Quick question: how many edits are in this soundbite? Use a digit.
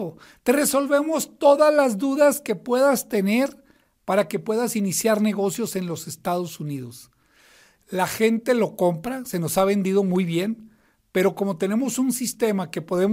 0